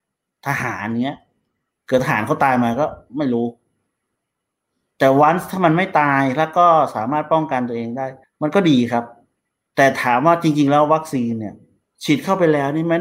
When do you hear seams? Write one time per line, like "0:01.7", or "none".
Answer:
0:08.2
0:11.8